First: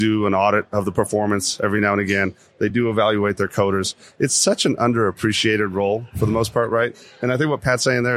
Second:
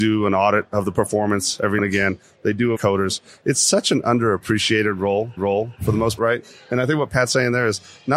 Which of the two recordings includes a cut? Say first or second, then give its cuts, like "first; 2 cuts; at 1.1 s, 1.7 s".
second; 4 cuts; at 1.8 s, 2.8 s, 5.4 s, 6.2 s